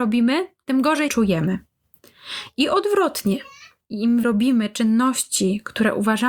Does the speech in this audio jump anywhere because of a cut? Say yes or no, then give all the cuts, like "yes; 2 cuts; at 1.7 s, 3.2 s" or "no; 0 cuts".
yes; 2 cuts; at 1.1 s, 4.2 s